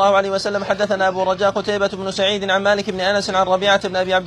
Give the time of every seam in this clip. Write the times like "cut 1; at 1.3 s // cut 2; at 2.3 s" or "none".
none